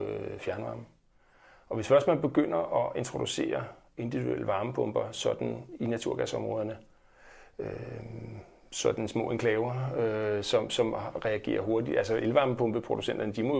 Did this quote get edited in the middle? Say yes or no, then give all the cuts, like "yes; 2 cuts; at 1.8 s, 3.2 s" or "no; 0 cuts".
no; 0 cuts